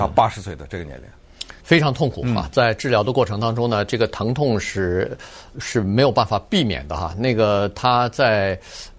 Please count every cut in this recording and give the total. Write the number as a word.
two